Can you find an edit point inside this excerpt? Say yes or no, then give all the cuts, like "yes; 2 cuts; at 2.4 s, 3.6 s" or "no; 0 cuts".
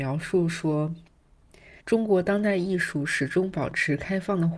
yes; 1 cut; at 1.8 s